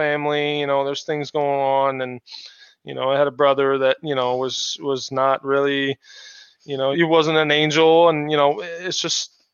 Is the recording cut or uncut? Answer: cut